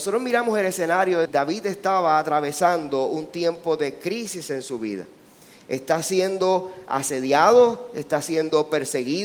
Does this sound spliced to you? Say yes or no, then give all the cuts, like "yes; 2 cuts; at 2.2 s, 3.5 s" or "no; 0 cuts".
yes; 1 cut; at 1.3 s